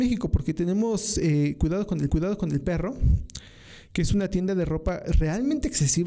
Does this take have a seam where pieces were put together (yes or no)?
yes